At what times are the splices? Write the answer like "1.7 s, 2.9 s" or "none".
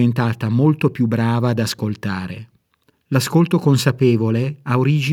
2.9 s

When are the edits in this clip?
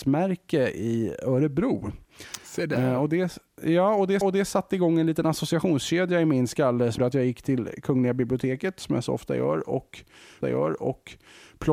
4.2 s, 7.0 s, 10.4 s

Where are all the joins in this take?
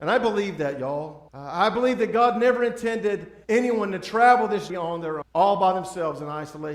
1.3 s, 3.4 s, 4.7 s, 5.2 s

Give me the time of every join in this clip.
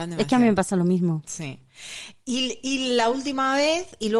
none

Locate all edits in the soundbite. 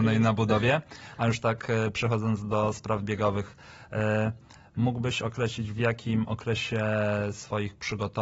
none

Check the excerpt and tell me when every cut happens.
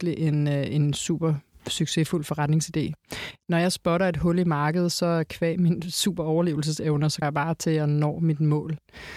7.2 s

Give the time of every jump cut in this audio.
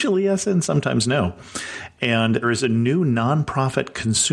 2.4 s

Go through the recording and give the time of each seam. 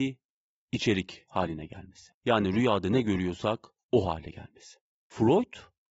2.2 s, 4.9 s

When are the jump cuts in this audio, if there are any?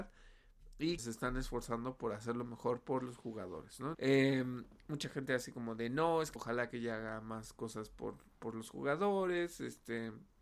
1.0 s, 3.9 s, 6.4 s

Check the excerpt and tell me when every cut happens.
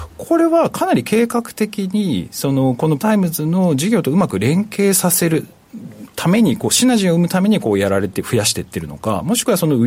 3.0 s

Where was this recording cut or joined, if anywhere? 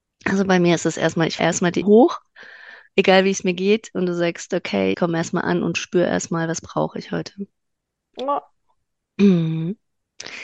1.4 s, 1.8 s, 4.9 s

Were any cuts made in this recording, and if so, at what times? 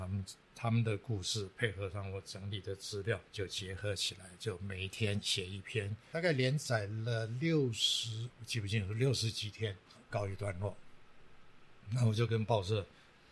3.2 s, 9.9 s

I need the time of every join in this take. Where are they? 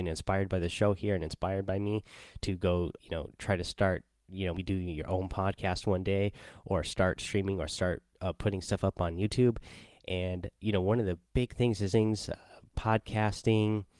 3.0 s, 4.5 s, 11.2 s, 11.9 s

